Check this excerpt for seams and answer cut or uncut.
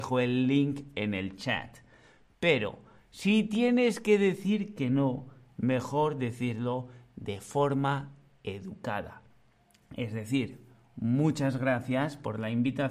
uncut